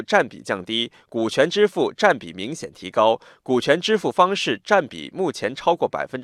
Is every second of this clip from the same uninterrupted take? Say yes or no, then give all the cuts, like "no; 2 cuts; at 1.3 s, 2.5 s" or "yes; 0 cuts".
yes; 0 cuts